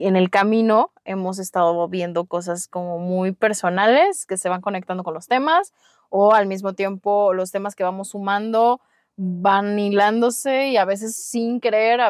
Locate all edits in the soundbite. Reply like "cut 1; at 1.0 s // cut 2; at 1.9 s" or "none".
none

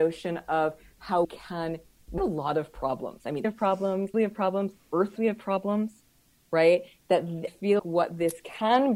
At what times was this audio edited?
cut 1; at 1.2 s // cut 2; at 2.2 s // cut 3; at 3.4 s // cut 4; at 4.1 s // cut 5; at 5.2 s // cut 6; at 7.5 s // cut 7; at 7.8 s

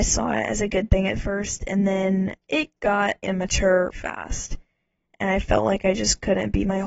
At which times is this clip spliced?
cut 1; at 2.4 s // cut 2; at 3.2 s // cut 3; at 3.9 s

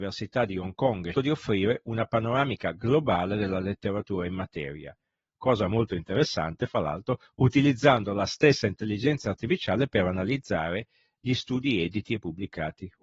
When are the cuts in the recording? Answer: cut 1; at 1.1 s

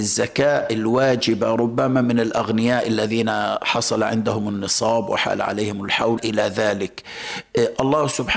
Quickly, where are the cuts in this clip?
cut 1; at 6.2 s

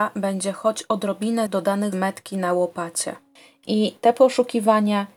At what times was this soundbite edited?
cut 1; at 1.5 s // cut 2; at 1.9 s

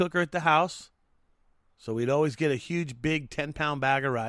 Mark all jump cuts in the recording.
none

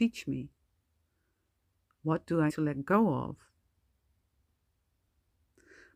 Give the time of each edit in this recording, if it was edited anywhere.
cut 1; at 2.5 s

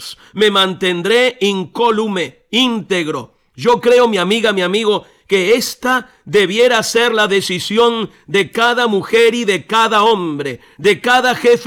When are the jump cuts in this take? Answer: none

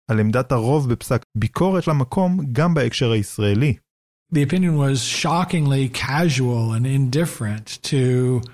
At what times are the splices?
cut 1; at 1.2 s // cut 2; at 1.8 s

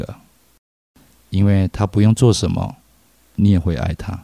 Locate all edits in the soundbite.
none

